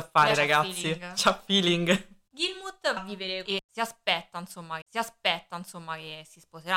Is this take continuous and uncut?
no; 3 cuts; at 3.0 s, 3.5 s, 4.8 s

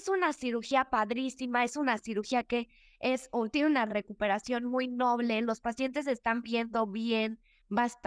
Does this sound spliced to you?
no; 0 cuts

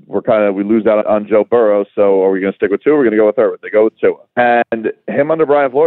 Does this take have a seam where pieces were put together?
yes; 2 cuts; at 1.0 s, 4.3 s

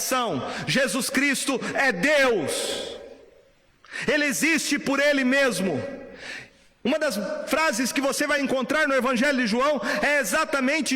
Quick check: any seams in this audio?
no; 0 cuts

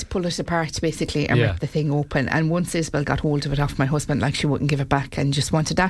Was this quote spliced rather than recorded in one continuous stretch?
no; 0 cuts

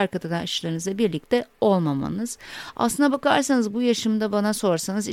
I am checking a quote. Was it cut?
no; 0 cuts

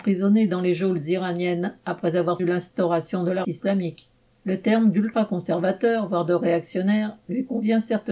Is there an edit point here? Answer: yes; 2 cuts; at 2.4 s, 3.4 s

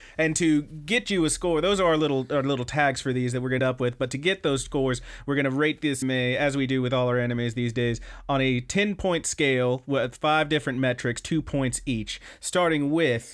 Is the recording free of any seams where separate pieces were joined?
no; 2 cuts; at 3.6 s, 6.0 s

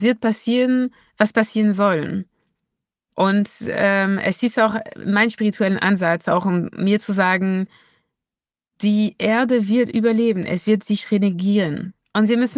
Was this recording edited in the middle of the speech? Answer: no; 0 cuts

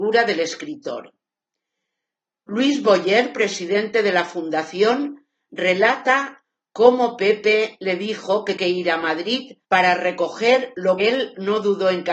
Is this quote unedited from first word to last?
no; 3 cuts; at 8.6 s, 9.6 s, 11.0 s

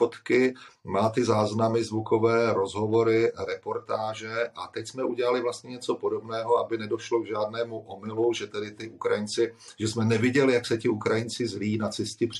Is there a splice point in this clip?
no; 0 cuts

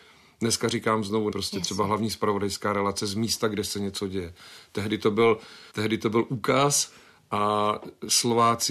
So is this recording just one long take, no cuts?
no; 2 cuts; at 1.3 s, 5.7 s

